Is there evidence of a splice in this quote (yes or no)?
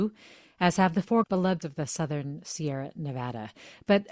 yes